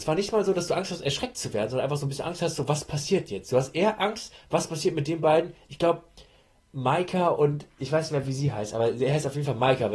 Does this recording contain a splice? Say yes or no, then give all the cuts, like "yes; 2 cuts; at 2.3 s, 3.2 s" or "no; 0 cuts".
no; 0 cuts